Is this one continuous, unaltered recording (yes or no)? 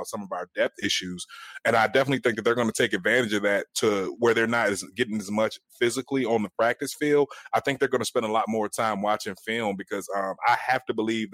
yes